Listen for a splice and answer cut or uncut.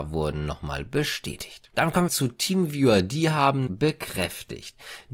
cut